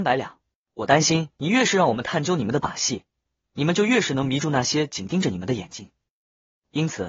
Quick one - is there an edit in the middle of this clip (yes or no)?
yes